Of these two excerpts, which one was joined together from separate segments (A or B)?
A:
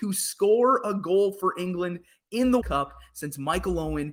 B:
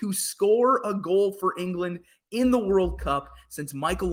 A